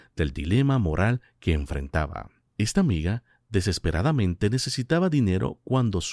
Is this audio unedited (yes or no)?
yes